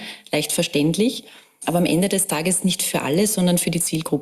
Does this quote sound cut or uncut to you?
uncut